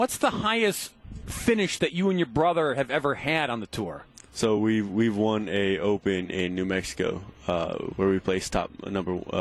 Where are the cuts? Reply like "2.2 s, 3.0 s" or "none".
none